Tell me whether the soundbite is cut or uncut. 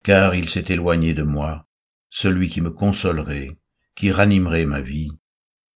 uncut